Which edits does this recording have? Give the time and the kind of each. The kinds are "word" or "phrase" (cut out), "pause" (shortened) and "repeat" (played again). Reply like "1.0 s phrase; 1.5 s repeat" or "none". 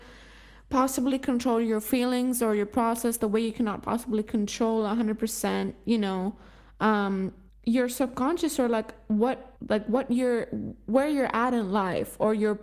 7.5 s pause; 9.6 s pause